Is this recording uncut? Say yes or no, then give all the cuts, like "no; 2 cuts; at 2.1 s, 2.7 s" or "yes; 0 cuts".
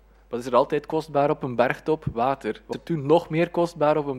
no; 1 cut; at 2.7 s